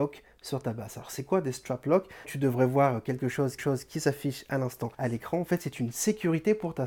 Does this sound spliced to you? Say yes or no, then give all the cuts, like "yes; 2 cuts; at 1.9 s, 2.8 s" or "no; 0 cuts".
yes; 3 cuts; at 2.2 s, 3.6 s, 4.9 s